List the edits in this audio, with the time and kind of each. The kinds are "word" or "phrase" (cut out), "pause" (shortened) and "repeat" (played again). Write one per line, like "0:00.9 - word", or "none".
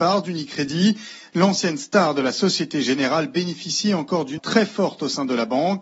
0:04.4 - word

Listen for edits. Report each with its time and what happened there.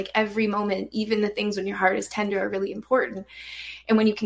none

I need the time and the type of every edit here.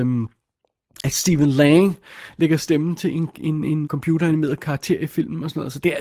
0:03.8 - word

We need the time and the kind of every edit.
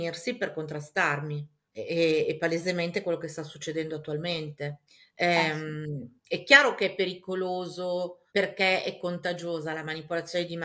0:01.7 - pause
0:04.9 - pause
0:08.3 - pause

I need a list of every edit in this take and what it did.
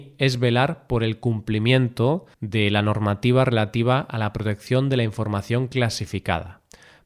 0:02.3 - pause

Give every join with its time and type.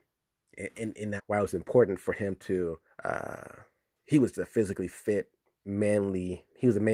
0:01.2 - phrase
0:02.9 - pause
0:04.3 - word

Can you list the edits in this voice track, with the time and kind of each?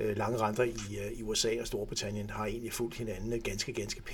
none

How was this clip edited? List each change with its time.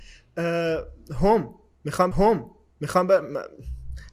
0:02.1 - repeat

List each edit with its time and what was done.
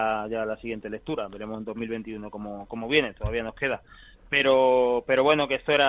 none

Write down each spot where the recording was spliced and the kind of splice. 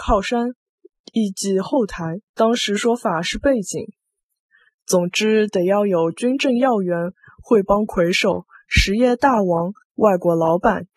0:02.3 - pause

